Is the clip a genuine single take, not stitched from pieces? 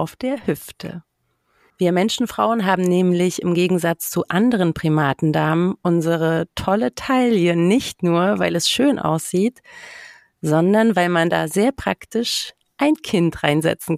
yes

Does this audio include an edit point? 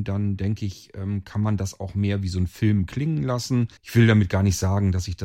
yes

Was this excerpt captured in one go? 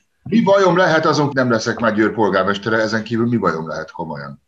no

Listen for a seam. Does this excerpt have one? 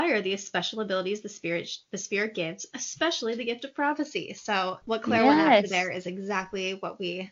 yes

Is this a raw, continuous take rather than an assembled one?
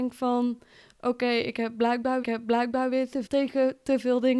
no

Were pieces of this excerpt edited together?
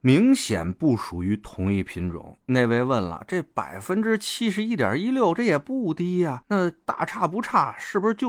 yes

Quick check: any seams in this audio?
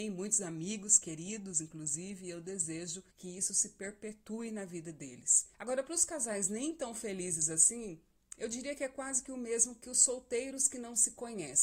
yes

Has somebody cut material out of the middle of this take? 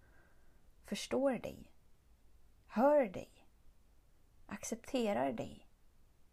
no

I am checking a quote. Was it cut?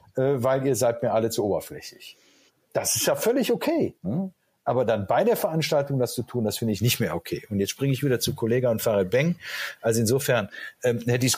yes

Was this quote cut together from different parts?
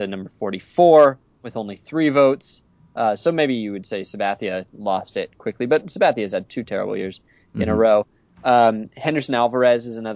no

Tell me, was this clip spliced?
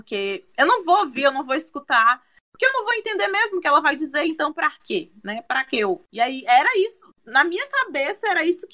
no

